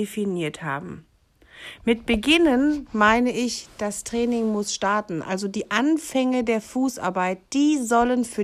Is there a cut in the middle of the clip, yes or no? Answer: no